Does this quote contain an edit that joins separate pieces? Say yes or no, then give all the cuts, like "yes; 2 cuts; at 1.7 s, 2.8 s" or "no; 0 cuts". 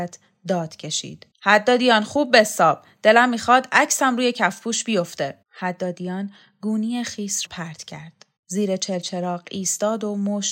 yes; 4 cuts; at 1.3 s, 5.4 s, 7.5 s, 8.4 s